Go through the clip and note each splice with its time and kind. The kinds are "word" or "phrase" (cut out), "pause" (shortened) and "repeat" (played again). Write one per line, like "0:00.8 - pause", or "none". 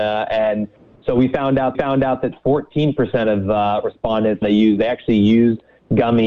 0:01.7 - repeat
0:04.4 - phrase